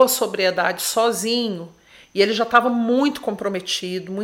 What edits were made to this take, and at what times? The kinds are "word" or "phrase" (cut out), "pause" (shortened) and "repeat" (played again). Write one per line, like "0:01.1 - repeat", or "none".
none

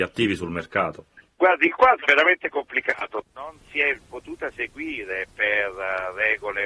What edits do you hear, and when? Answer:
0:02.0 - word

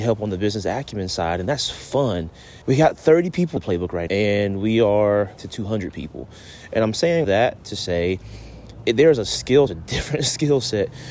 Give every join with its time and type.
0:02.6 - pause
0:03.6 - word
0:04.1 - word
0:05.4 - phrase
0:07.2 - word
0:09.7 - phrase

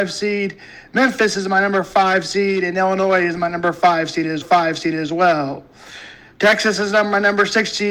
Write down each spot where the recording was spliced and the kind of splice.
0:04.4 - repeat

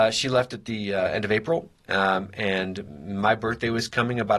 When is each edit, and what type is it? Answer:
none

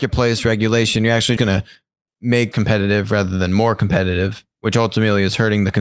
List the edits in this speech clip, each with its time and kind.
0:01.4 - word
0:02.5 - phrase

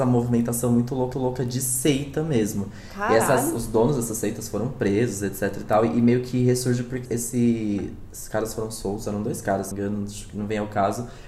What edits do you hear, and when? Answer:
0:01.1 - repeat
0:07.0 - word
0:09.7 - phrase

